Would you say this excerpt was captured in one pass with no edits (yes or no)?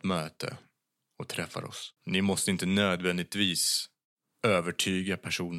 no